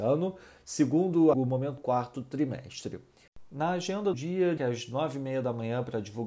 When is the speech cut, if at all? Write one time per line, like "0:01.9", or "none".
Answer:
0:01.3
0:01.8
0:04.1
0:04.6